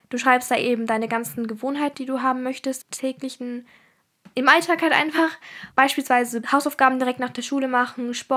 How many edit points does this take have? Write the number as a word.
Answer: three